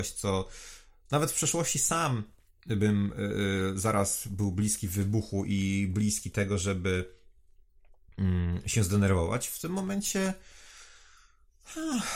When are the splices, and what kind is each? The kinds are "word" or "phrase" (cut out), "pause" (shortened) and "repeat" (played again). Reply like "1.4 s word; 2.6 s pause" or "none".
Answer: none

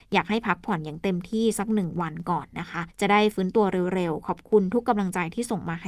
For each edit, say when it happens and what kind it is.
2.9 s pause

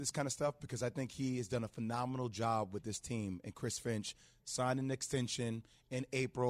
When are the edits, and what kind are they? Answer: none

